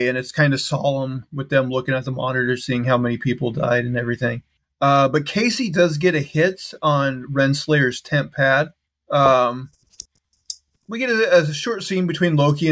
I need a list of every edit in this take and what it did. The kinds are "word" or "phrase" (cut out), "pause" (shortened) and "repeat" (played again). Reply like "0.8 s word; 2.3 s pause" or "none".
none